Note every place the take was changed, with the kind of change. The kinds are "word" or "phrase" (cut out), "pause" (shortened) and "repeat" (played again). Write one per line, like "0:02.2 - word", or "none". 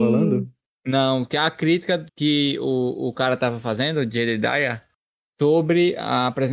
0:02.1 - word